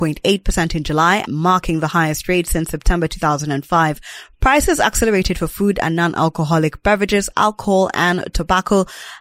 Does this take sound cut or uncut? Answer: cut